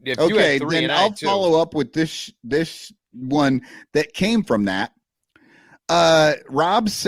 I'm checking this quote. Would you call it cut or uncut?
uncut